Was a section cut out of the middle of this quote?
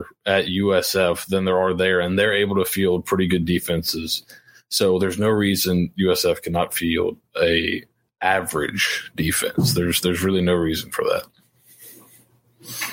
no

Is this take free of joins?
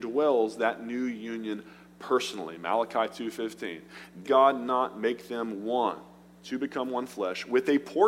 no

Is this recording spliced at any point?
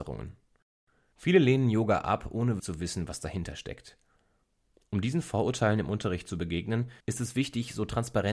yes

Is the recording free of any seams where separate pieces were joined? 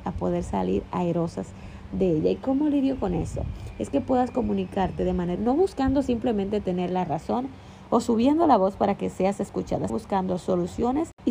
no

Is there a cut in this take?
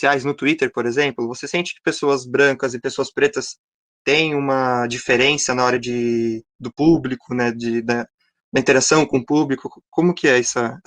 no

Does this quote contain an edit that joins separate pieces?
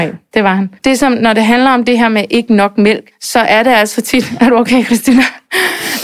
no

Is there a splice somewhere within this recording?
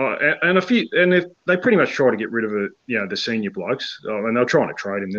no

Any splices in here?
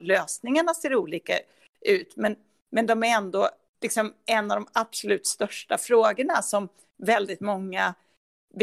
no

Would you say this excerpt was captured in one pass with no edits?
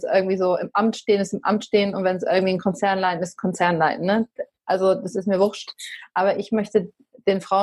yes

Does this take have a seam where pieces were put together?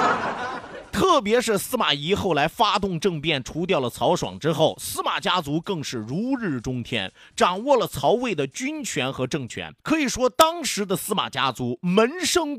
yes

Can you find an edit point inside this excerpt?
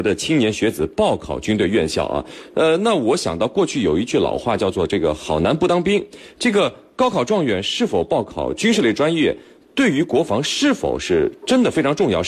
no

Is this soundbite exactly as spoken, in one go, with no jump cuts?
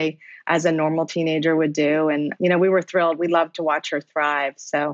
yes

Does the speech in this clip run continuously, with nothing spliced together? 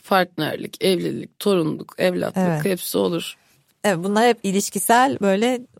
yes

